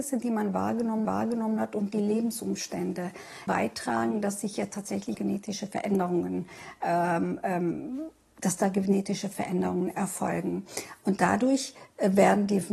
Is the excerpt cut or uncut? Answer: cut